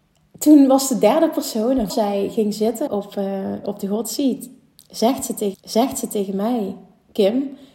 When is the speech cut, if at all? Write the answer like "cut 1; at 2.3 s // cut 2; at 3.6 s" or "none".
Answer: cut 1; at 1.9 s // cut 2; at 2.9 s // cut 3; at 5.5 s